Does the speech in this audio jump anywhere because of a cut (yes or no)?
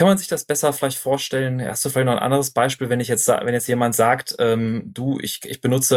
no